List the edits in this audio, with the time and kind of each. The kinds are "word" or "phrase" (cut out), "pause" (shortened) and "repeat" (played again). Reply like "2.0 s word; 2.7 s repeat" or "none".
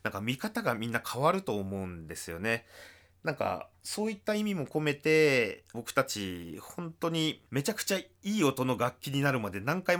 none